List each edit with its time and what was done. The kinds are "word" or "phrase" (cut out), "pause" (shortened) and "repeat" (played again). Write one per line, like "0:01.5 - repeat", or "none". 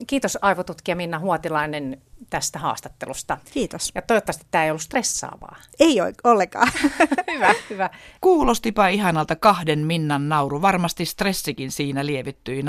0:03.5 - pause
0:08.2 - pause